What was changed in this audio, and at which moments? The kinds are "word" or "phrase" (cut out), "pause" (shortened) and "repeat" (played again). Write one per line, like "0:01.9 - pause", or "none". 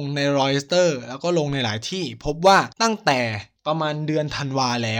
0:02.7 - pause
0:03.6 - pause

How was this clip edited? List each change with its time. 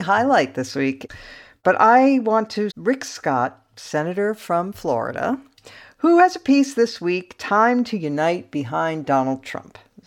0:02.7 - word

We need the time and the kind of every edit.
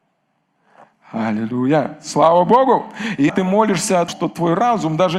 0:03.3 - word
0:04.1 - word

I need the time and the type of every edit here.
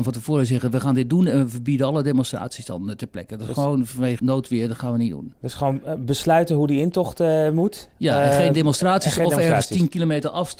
0:04.2 - word

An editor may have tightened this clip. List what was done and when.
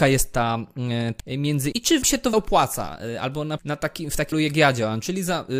0:01.2 - word
0:01.7 - word
0:02.0 - word
0:02.3 - word
0:03.6 - word
0:04.3 - word

